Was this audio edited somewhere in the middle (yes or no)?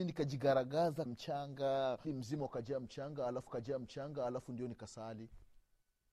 yes